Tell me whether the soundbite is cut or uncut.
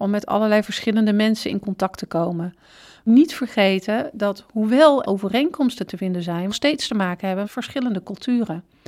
cut